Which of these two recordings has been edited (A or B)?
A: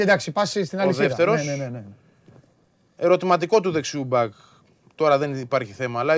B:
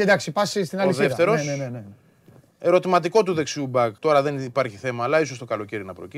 B